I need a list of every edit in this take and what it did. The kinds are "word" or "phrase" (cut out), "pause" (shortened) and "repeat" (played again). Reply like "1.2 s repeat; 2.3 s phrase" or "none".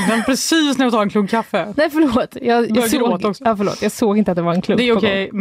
none